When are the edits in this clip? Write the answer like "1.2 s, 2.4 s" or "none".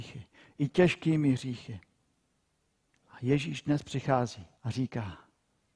4.5 s